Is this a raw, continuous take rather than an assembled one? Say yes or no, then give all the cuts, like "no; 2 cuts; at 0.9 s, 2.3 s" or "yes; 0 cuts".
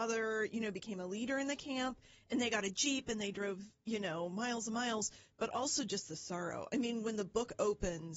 yes; 0 cuts